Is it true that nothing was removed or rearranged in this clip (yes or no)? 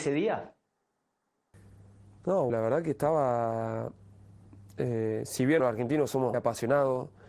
no